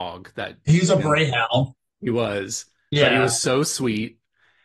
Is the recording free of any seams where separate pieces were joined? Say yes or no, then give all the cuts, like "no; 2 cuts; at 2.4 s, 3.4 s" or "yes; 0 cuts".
no; 1 cut; at 1.0 s